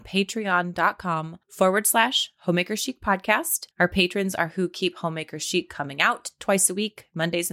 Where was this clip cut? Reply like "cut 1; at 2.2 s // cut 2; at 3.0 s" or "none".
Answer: cut 1; at 1.4 s // cut 2; at 3.7 s